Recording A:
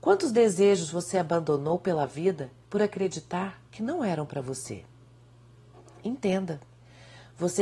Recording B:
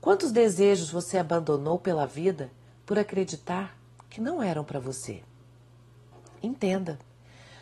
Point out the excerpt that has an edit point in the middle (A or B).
A